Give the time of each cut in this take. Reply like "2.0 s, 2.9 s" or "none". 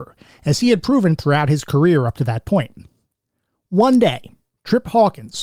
none